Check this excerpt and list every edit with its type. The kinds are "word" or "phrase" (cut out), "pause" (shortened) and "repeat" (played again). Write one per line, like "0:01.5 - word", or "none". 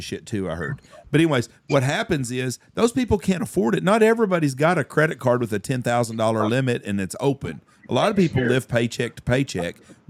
none